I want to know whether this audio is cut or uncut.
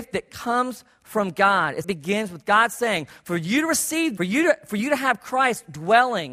cut